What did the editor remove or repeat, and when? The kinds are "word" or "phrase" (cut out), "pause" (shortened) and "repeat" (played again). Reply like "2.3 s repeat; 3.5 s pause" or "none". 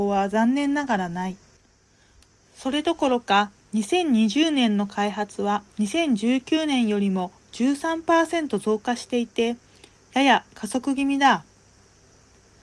5.7 s pause